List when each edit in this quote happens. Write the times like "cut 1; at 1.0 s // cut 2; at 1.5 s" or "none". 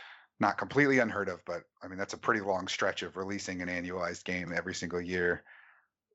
none